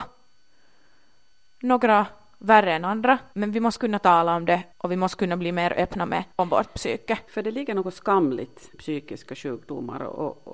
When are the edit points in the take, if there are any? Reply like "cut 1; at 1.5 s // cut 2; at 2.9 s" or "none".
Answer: cut 1; at 3.3 s // cut 2; at 4.7 s // cut 3; at 6.3 s // cut 4; at 8.7 s